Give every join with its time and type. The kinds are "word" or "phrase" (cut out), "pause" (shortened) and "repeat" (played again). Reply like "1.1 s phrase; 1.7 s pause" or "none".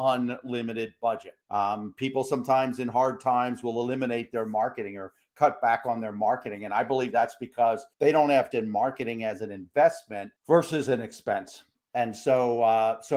1.4 s pause; 7.9 s pause; 8.5 s word; 10.4 s pause